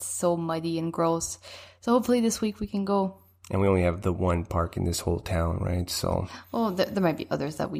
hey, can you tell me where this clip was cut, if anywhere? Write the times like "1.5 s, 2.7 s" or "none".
none